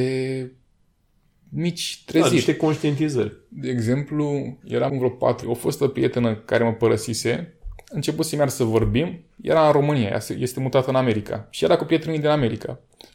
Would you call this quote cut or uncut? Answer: cut